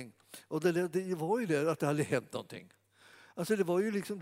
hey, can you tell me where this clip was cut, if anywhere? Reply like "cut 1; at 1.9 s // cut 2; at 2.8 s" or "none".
none